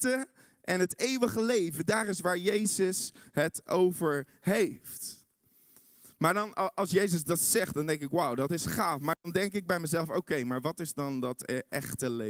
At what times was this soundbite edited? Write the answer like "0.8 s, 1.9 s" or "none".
none